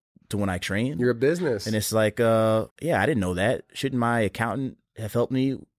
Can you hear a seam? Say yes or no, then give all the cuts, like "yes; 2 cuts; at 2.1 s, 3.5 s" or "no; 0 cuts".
yes; 1 cut; at 2.7 s